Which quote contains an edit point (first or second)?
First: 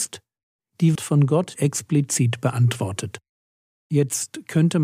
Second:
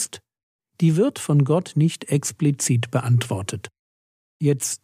first